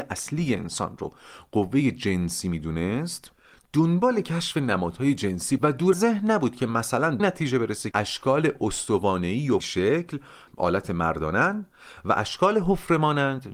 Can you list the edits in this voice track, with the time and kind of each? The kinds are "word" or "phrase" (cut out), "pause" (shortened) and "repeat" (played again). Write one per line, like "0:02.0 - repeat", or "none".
0:05.6 - word
0:05.9 - word
0:07.2 - word
0:07.9 - word
0:09.6 - word
0:10.5 - word